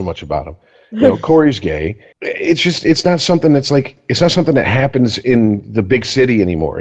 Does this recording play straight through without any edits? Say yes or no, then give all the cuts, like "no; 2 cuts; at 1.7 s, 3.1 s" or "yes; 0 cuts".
no; 1 cut; at 2.1 s